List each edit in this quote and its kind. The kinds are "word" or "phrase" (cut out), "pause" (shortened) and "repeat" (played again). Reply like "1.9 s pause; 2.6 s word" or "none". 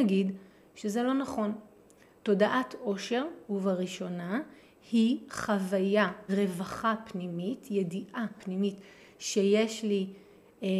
3.4 s word; 6.3 s word; 8.4 s word